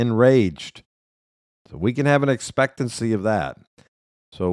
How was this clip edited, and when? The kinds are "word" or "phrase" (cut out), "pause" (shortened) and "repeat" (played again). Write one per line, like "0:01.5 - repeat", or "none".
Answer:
none